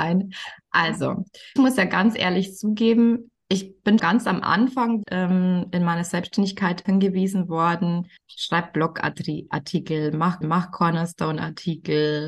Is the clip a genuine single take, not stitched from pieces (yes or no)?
no